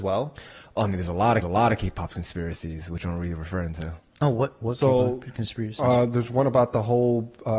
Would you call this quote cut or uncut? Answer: cut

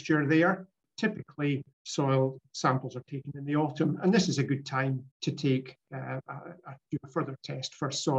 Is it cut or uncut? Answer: cut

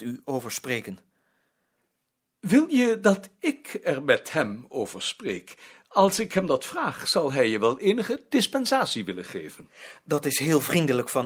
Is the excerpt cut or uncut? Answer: uncut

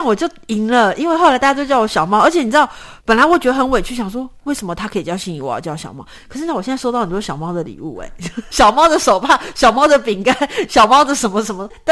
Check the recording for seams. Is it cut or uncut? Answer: cut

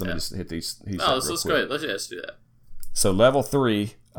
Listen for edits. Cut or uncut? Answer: uncut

